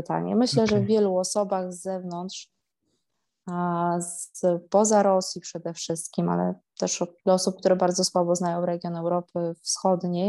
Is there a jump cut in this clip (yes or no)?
yes